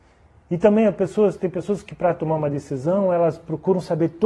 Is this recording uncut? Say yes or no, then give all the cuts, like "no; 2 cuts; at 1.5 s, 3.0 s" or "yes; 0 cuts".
yes; 0 cuts